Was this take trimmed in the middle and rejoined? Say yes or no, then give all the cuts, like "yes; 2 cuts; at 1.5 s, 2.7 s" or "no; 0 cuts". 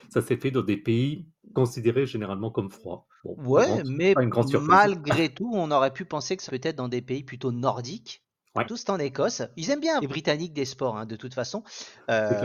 yes; 3 cuts; at 6.5 s, 8.6 s, 10.0 s